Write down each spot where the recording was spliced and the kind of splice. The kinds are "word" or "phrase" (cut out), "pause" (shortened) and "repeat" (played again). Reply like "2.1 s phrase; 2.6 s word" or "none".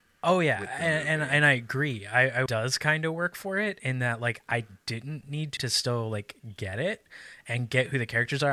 2.5 s phrase; 5.6 s phrase

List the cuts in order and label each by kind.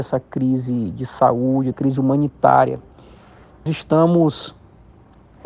1.7 s word; 3.7 s word

